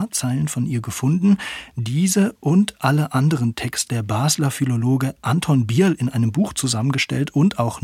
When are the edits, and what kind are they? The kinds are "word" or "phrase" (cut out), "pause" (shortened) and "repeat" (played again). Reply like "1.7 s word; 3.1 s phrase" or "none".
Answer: 3.9 s phrase